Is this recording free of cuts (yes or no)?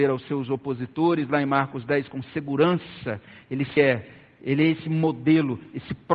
no